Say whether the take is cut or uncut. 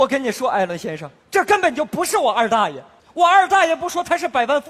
cut